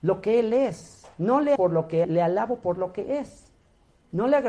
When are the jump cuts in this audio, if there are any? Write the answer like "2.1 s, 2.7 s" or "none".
1.6 s, 2.0 s